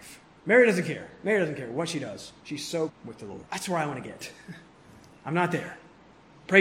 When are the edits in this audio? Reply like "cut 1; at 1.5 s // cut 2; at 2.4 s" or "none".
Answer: cut 1; at 2.9 s // cut 2; at 3.5 s

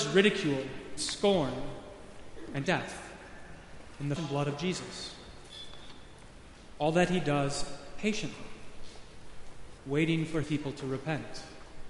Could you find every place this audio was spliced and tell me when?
cut 1; at 1.0 s // cut 2; at 2.6 s // cut 3; at 4.2 s // cut 4; at 9.8 s // cut 5; at 10.4 s

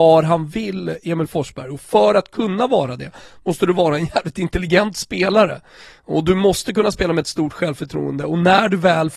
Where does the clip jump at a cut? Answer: none

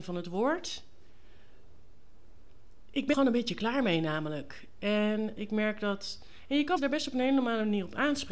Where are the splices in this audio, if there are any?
cut 1; at 3.1 s // cut 2; at 5.4 s // cut 3; at 6.8 s

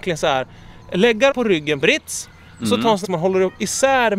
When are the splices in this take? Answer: cut 1; at 1.3 s // cut 2; at 1.8 s // cut 3; at 3.0 s

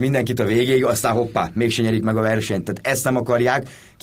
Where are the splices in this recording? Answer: none

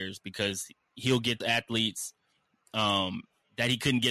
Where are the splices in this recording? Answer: cut 1; at 1.4 s

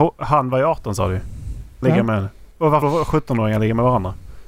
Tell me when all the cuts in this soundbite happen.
cut 1; at 1.8 s // cut 2; at 2.5 s // cut 3; at 2.8 s

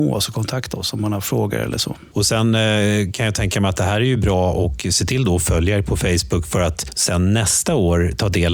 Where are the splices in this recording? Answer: none

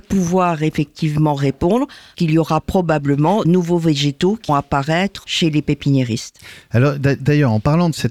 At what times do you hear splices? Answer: cut 1; at 2.1 s // cut 2; at 3.4 s // cut 3; at 4.5 s // cut 4; at 5.2 s

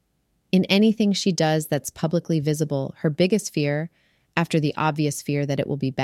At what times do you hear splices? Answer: none

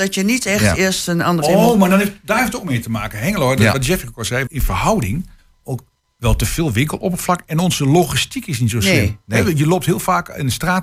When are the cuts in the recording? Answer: cut 1; at 1.4 s // cut 2; at 4.5 s

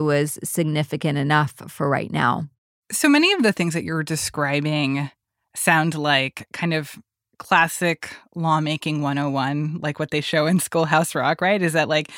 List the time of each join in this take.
none

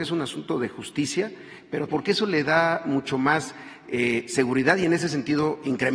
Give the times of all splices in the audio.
cut 1; at 1.9 s

